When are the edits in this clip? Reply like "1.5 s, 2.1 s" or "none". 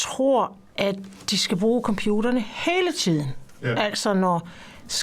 none

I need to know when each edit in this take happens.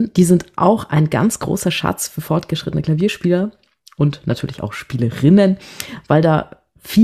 none

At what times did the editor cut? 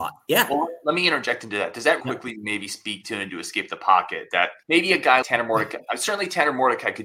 2.0 s, 3.3 s, 4.6 s, 5.2 s

